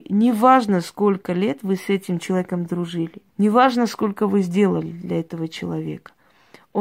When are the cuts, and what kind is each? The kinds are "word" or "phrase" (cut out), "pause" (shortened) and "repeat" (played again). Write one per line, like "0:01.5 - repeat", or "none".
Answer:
0:03.3 - pause